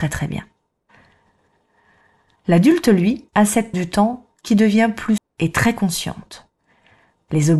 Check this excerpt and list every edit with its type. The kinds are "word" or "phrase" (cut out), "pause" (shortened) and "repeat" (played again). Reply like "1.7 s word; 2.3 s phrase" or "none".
3.3 s pause; 3.7 s word; 5.2 s word